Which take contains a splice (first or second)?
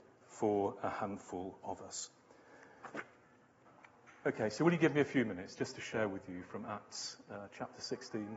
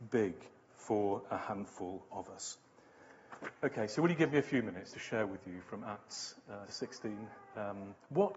second